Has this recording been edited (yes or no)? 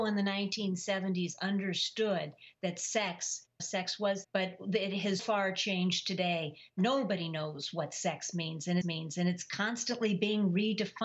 yes